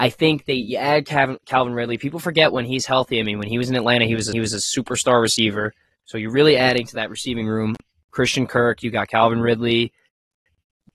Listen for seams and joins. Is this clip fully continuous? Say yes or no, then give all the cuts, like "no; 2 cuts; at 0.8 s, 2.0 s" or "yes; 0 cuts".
no; 1 cut; at 4.3 s